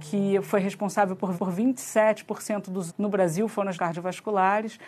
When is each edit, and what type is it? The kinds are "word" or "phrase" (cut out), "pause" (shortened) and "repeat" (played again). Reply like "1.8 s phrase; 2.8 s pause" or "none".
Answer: 1.4 s repeat; 2.9 s word; 3.7 s word